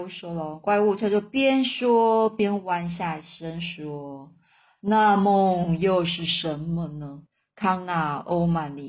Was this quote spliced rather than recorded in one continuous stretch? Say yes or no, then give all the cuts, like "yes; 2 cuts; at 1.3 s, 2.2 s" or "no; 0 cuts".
yes; 1 cut; at 7.3 s